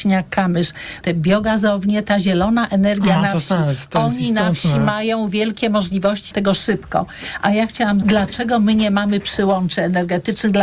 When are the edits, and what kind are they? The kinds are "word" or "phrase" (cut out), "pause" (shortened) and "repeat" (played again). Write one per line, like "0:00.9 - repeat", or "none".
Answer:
0:01.0 - word
0:06.3 - word
0:08.0 - word